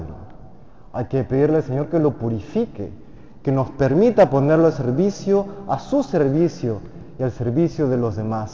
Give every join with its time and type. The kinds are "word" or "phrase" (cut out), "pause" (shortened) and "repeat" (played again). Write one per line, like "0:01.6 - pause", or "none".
none